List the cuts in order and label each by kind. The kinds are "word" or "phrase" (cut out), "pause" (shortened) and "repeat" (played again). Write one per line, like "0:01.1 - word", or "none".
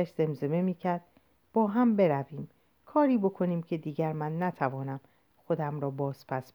none